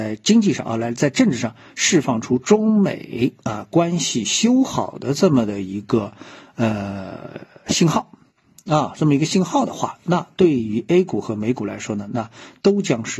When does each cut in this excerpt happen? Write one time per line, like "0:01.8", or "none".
none